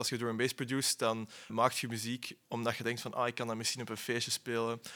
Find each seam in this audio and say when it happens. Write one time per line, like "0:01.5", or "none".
0:01.5
0:02.4
0:02.8